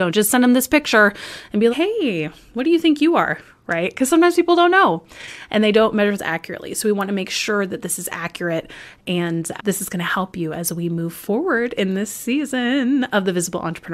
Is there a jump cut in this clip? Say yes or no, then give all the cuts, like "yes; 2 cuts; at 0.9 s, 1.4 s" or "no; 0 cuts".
yes; 3 cuts; at 1.7 s, 6.2 s, 9.6 s